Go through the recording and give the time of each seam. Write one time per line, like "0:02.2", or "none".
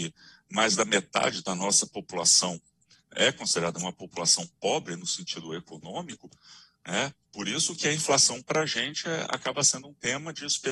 none